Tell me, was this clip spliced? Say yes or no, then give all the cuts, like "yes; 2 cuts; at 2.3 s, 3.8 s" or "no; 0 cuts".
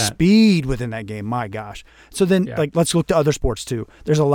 no; 0 cuts